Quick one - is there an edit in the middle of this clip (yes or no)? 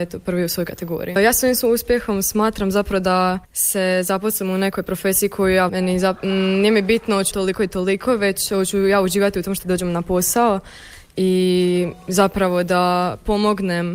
yes